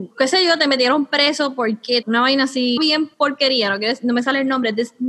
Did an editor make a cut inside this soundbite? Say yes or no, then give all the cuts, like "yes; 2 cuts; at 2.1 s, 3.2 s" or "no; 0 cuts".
yes; 3 cuts; at 2.0 s, 2.8 s, 3.1 s